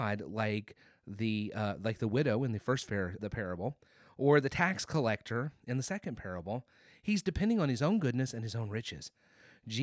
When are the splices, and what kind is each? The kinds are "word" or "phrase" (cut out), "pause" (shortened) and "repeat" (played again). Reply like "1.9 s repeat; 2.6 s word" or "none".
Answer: 3.2 s word